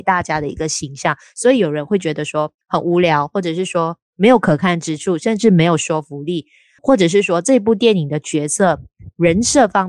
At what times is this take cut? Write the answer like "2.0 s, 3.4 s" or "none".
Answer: 2.6 s, 6.8 s